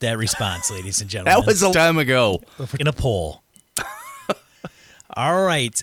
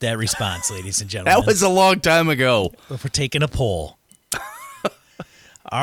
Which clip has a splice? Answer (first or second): first